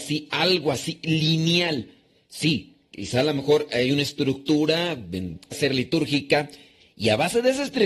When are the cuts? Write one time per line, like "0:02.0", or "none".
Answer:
0:05.5